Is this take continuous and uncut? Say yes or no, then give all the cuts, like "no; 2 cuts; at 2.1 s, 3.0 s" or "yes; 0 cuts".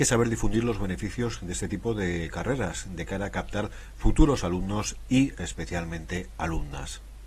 yes; 0 cuts